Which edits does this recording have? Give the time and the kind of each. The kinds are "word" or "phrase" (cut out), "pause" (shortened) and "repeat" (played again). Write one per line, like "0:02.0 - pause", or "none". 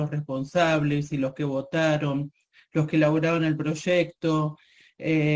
none